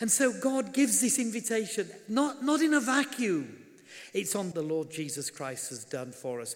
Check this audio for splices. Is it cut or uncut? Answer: cut